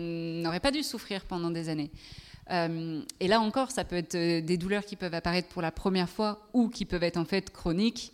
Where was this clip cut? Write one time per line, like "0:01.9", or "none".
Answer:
none